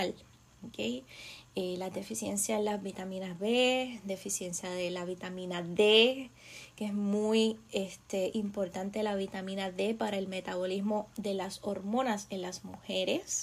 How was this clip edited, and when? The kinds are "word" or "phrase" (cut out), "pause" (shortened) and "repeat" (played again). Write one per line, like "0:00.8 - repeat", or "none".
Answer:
none